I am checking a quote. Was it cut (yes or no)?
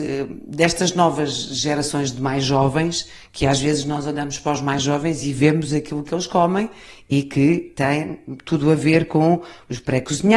no